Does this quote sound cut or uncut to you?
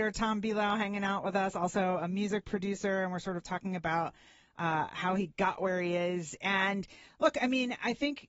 uncut